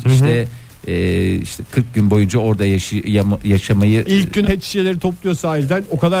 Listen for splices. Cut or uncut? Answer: cut